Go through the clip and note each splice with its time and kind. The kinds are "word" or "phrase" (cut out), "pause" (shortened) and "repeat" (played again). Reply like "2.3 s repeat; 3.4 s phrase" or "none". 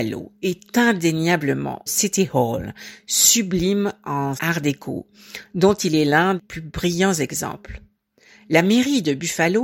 1.9 s word; 4.4 s word; 6.4 s word